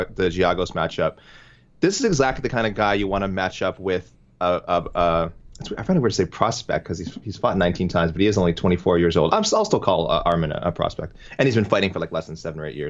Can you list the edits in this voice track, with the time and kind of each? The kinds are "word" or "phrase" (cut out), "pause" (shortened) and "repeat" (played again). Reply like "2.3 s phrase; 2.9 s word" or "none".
none